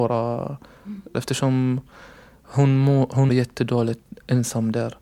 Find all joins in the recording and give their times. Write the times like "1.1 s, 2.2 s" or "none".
1.1 s, 3.3 s